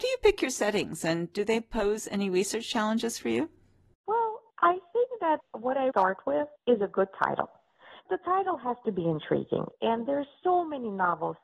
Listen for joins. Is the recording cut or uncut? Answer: cut